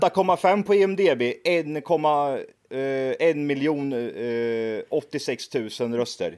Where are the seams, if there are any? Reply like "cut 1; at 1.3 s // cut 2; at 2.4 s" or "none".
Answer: none